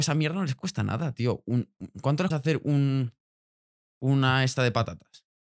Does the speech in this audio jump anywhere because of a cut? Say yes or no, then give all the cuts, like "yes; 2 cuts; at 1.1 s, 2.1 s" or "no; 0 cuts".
yes; 1 cut; at 2.3 s